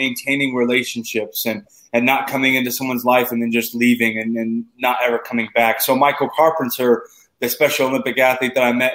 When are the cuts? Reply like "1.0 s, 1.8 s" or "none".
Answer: none